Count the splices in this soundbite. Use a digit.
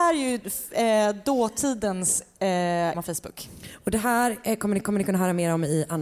2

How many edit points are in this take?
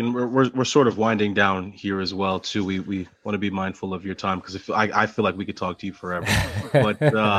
1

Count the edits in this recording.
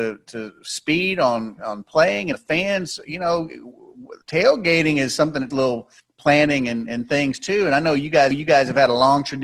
5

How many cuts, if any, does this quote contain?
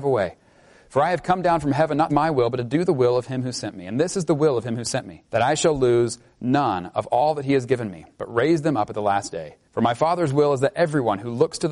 4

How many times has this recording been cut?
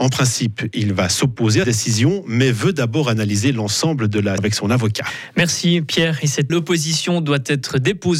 3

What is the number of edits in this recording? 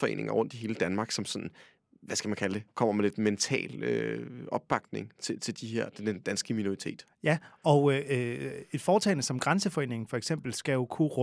0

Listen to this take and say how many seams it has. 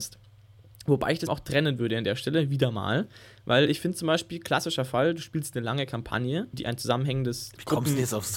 2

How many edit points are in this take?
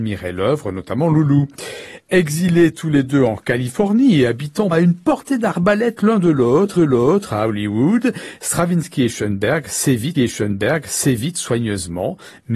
3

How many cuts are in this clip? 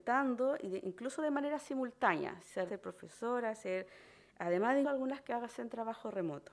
2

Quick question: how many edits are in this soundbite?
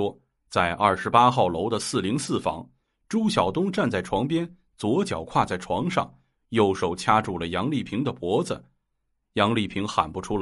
0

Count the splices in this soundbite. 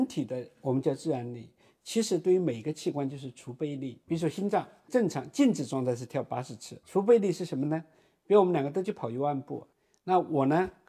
2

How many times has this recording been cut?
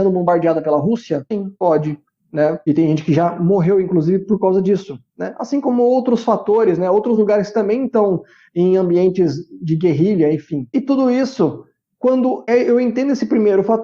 0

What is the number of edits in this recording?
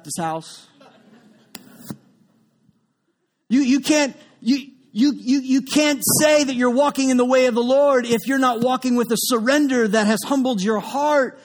0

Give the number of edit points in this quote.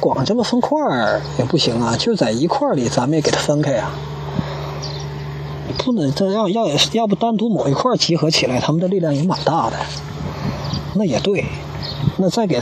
1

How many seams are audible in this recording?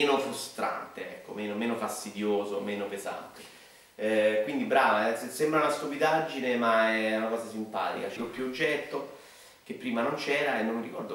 1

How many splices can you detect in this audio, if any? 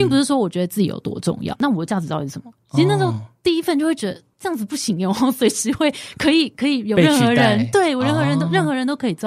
1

